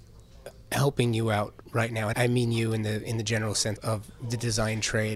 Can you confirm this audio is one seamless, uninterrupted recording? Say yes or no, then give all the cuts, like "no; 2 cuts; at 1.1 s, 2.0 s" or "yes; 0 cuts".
no; 3 cuts; at 1.6 s, 2.1 s, 3.8 s